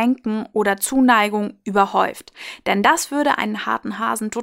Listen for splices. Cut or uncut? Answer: uncut